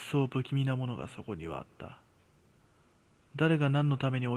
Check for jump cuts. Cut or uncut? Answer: uncut